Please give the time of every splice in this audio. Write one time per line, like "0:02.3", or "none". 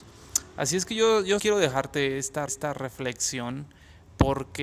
0:01.4
0:02.5